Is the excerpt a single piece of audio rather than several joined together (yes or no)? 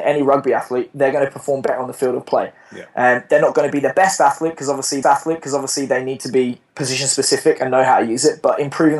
no